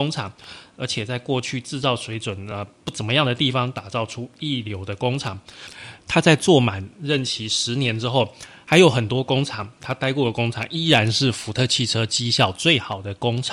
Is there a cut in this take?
no; 0 cuts

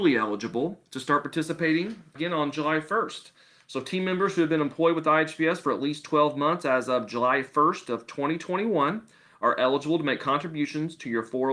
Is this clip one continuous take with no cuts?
no; 1 cut; at 2.1 s

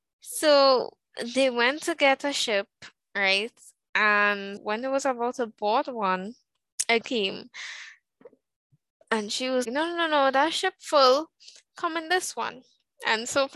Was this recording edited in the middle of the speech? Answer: yes; 3 cuts; at 4.6 s, 7.0 s, 9.6 s

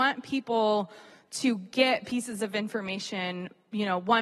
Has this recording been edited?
no; 0 cuts

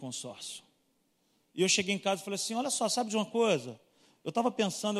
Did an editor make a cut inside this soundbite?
no; 0 cuts

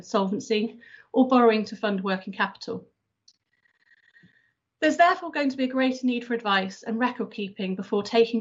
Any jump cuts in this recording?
no; 0 cuts

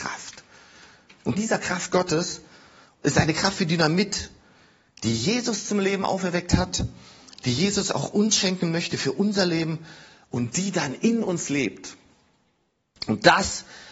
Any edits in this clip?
yes; 1 cut; at 1.4 s

